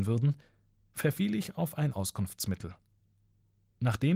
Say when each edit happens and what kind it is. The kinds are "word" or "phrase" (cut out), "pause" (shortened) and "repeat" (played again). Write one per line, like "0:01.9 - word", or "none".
0:01.9 - word